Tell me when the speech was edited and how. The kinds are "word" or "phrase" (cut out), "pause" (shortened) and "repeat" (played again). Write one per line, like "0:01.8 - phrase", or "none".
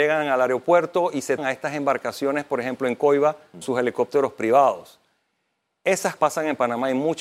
0:01.4 - word
0:03.6 - word
0:06.2 - word